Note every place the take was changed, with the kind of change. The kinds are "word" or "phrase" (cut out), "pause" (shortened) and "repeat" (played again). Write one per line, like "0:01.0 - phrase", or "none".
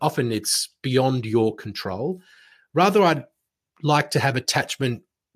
none